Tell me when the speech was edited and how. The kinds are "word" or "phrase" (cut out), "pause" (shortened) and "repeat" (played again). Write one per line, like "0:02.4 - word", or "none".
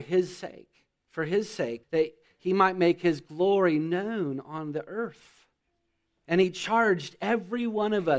0:01.0 - pause
0:01.8 - word
0:05.7 - pause